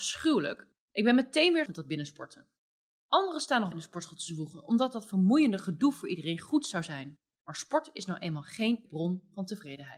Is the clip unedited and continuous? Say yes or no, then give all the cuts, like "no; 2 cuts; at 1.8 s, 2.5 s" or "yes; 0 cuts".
no; 3 cuts; at 1.7 s, 3.7 s, 8.9 s